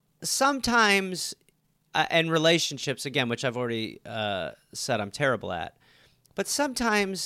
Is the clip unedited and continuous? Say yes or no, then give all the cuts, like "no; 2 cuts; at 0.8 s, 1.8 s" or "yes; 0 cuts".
yes; 0 cuts